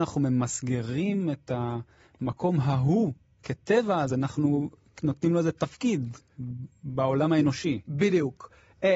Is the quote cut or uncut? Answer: uncut